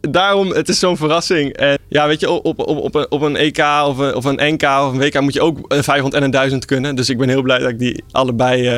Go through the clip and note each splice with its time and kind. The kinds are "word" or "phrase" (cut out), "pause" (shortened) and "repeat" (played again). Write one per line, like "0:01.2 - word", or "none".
0:01.8 - word